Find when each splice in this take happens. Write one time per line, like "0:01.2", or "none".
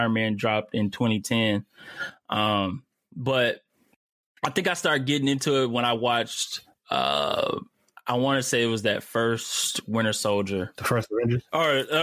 none